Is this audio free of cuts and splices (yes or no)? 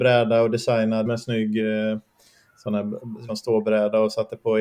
no